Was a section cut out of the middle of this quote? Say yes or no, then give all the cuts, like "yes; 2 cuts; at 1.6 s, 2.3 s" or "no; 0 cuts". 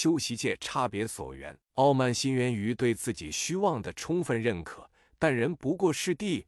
yes; 1 cut; at 1.6 s